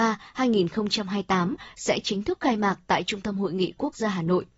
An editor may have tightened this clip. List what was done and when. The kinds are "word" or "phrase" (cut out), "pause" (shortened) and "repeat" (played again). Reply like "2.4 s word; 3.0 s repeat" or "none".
none